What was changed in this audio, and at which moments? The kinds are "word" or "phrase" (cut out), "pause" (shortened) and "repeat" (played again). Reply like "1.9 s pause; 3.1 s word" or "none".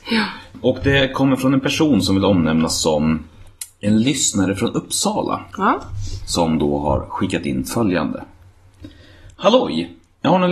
none